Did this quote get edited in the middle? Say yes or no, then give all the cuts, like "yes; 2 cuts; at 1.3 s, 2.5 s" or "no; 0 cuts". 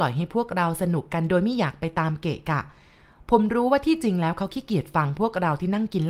no; 0 cuts